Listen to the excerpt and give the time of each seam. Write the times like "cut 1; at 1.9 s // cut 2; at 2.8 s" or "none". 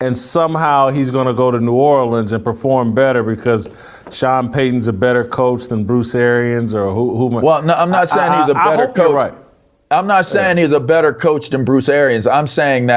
none